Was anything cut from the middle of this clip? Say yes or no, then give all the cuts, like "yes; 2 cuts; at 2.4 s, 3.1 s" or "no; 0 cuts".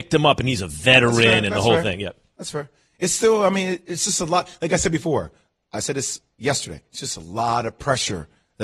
no; 0 cuts